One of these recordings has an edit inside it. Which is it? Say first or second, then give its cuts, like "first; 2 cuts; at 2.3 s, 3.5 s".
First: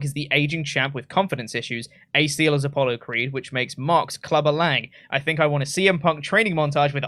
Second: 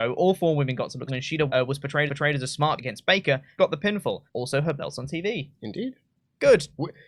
second; 7 cuts; at 1.1 s, 1.5 s, 2.1 s, 2.8 s, 3.6 s, 4.3 s, 6.1 s